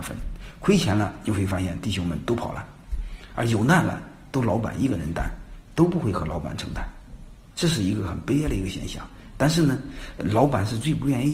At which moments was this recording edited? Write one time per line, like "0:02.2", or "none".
0:07.5